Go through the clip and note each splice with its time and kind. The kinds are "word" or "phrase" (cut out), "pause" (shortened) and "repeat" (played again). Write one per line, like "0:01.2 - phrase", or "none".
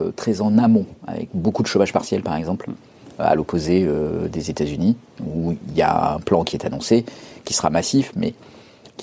0:01.0 - pause